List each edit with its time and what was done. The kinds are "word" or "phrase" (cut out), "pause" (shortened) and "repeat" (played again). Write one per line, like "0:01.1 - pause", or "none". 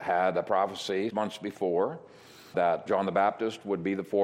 0:01.1 - word
0:02.5 - word
0:02.9 - word